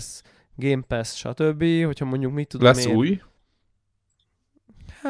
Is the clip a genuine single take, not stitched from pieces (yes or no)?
yes